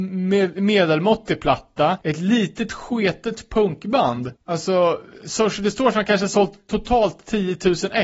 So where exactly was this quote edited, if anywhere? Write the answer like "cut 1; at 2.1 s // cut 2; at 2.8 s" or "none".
cut 1; at 2.0 s // cut 2; at 4.4 s